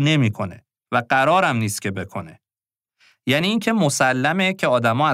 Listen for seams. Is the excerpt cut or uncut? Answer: uncut